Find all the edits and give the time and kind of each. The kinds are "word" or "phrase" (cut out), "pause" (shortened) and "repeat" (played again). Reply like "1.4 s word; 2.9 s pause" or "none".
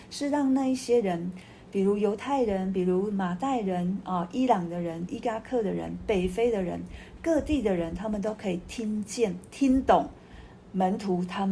5.1 s phrase